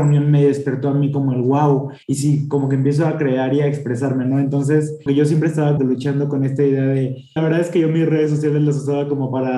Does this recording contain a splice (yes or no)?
yes